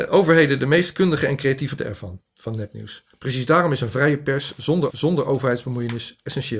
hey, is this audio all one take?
no; 2 cuts; at 1.8 s, 4.9 s

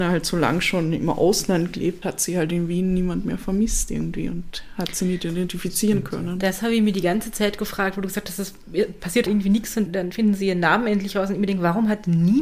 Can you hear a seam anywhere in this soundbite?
yes; 3 cuts; at 2.0 s, 9.3 s, 9.9 s

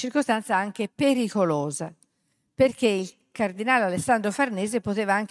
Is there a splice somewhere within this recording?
no; 0 cuts

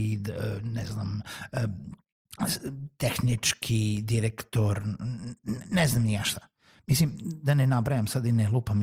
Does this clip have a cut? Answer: no; 0 cuts

